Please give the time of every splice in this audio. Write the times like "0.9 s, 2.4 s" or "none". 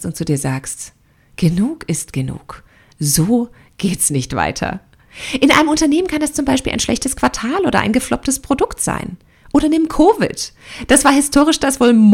none